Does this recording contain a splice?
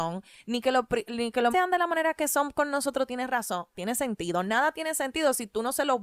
yes; 2 cuts; at 1.5 s, 3.7 s

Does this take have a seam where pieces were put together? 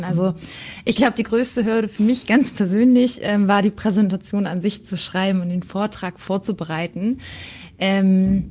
no; 0 cuts

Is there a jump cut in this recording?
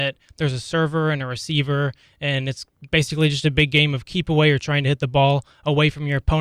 no; 0 cuts

